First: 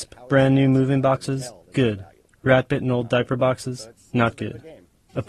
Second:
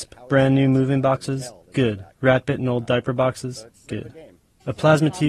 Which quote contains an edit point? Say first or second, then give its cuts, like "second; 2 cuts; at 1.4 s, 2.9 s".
second; 2 cuts; at 2.1 s, 3.9 s